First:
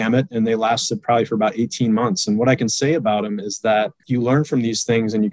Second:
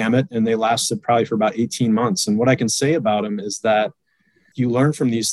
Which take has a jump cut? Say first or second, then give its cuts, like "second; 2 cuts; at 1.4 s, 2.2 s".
first; 1 cut; at 4.0 s